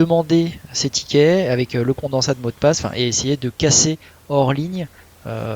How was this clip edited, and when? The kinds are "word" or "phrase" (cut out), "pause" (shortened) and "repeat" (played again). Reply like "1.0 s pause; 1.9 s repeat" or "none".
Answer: none

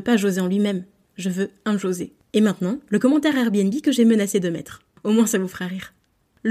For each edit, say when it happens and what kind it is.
none

